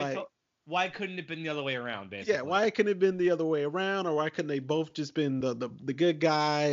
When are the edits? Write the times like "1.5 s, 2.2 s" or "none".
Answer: none

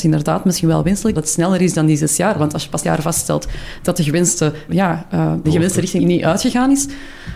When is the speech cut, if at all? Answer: 1.1 s, 2.8 s, 4.7 s, 5.4 s, 6.0 s

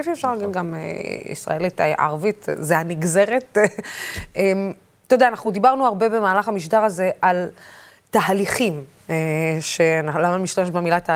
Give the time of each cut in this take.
none

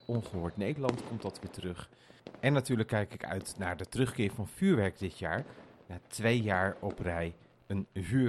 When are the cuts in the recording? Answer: none

